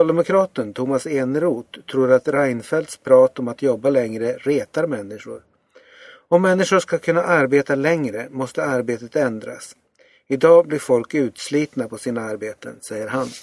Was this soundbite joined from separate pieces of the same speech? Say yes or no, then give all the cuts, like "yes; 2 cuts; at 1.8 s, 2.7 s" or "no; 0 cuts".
no; 0 cuts